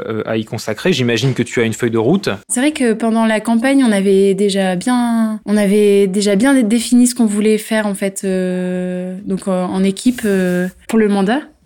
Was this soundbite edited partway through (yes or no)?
yes